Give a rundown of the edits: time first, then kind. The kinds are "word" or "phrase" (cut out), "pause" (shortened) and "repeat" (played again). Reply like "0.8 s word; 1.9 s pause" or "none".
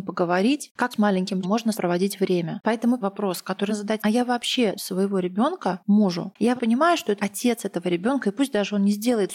0.9 s word; 1.4 s word; 1.7 s word; 3.0 s word; 3.7 s word; 4.0 s word; 4.7 s word; 6.6 s word; 7.2 s word